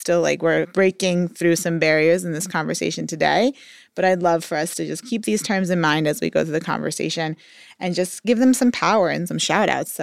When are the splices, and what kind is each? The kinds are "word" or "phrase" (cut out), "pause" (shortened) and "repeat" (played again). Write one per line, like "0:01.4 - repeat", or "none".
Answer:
none